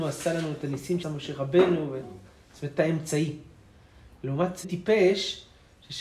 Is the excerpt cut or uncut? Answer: cut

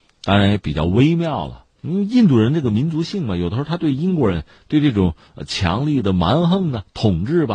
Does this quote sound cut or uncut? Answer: cut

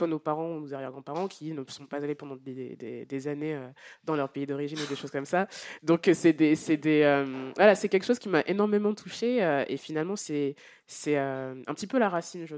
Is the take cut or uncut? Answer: uncut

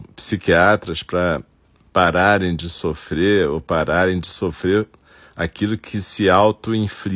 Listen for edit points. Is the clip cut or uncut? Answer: uncut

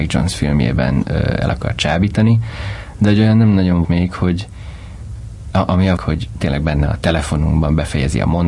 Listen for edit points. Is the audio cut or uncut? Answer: cut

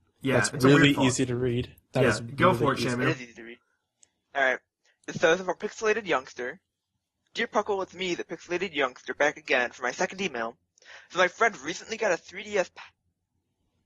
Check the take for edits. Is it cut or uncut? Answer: uncut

